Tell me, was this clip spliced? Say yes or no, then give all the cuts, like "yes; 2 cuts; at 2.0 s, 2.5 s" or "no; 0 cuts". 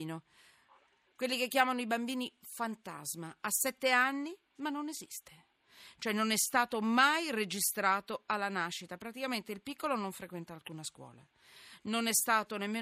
yes; 1 cut; at 4.4 s